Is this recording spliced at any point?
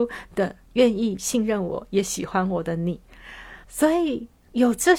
yes; 1 cut; at 3.6 s

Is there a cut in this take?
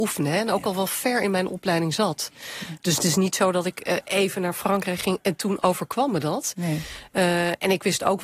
no; 0 cuts

